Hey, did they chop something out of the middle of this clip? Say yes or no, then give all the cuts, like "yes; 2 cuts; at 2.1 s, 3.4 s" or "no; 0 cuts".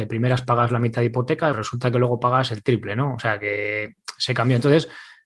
yes; 1 cut; at 1.5 s